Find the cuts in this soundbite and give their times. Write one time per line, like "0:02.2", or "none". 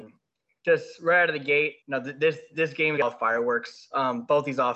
0:01.8
0:03.0